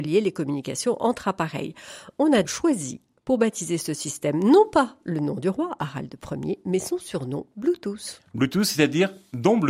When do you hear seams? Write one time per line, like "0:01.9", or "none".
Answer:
0:02.4